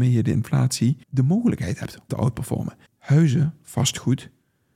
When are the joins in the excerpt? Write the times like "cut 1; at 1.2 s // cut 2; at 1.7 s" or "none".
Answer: cut 1; at 1.0 s // cut 2; at 2.1 s // cut 3; at 2.9 s